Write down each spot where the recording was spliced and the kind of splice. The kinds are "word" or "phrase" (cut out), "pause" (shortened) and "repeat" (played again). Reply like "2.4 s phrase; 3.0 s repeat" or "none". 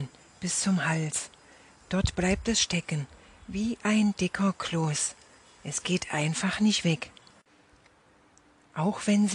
none